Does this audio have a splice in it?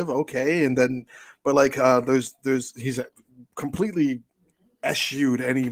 no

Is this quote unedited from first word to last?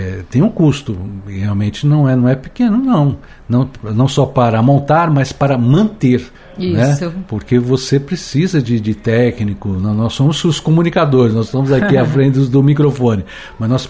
yes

